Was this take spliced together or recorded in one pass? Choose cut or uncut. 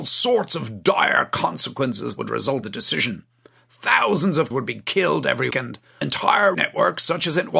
cut